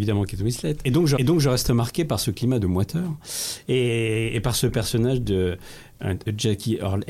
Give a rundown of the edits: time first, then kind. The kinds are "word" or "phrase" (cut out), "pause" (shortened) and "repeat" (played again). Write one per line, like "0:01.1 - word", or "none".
0:01.2 - repeat